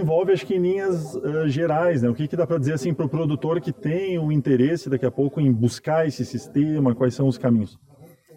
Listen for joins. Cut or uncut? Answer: uncut